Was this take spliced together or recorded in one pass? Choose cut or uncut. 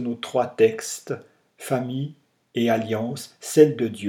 uncut